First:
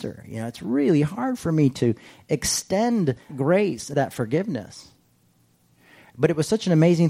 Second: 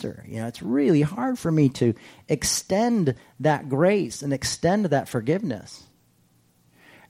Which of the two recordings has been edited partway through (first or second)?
first